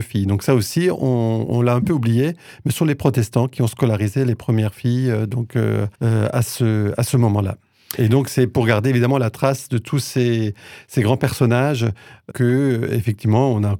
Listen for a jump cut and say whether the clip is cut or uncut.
cut